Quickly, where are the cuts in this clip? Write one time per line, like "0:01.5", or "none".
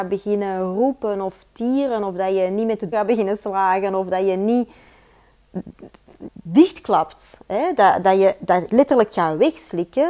0:02.9
0:06.3
0:08.0
0:08.7